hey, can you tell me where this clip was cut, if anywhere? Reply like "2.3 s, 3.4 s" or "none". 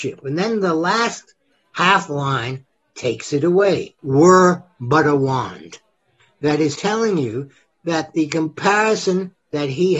4.0 s, 6.2 s, 6.7 s

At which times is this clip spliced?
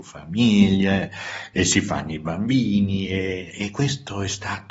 none

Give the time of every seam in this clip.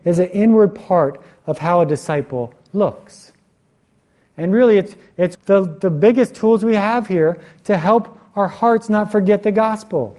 5.3 s

